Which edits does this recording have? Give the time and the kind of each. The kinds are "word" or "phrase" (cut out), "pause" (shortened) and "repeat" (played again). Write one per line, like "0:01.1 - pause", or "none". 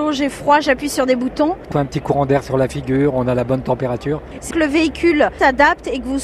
0:01.7 - word
0:04.5 - word